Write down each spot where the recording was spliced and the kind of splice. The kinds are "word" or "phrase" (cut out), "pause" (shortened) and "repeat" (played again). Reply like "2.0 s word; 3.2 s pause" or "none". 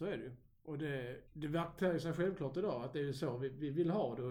1.3 s pause